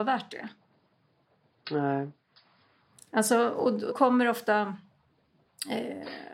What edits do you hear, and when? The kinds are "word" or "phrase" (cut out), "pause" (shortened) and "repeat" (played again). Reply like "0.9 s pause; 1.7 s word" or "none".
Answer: 3.9 s word